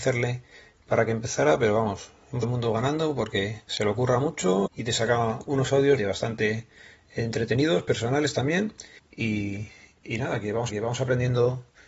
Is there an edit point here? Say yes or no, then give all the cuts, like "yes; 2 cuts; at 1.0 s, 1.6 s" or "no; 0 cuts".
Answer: yes; 5 cuts; at 2.4 s, 4.7 s, 6.0 s, 9.0 s, 10.7 s